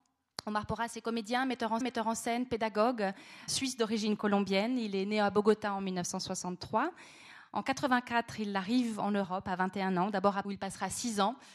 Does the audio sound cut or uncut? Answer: cut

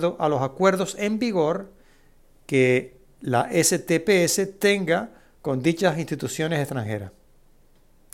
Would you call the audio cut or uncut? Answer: uncut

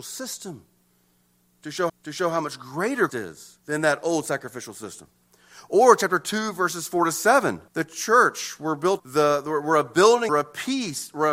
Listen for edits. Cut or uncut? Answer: cut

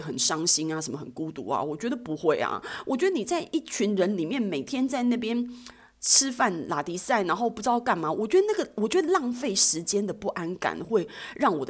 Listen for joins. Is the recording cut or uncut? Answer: uncut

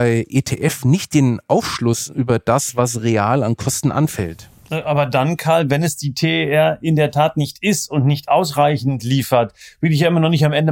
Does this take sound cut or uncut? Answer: uncut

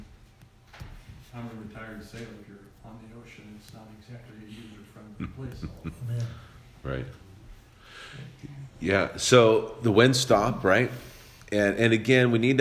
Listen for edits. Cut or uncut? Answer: cut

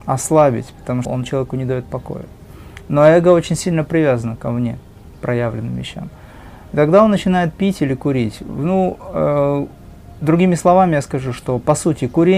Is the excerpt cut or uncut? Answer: cut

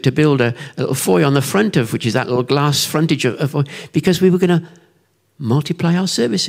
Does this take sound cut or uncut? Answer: uncut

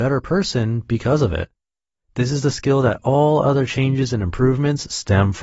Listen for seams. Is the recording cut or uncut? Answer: uncut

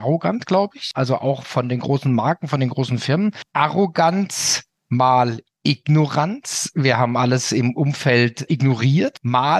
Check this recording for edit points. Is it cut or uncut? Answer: uncut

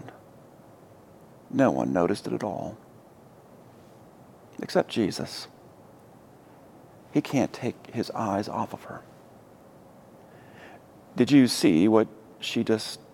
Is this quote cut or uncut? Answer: uncut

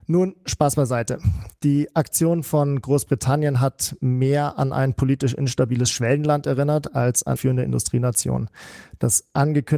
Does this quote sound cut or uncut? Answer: cut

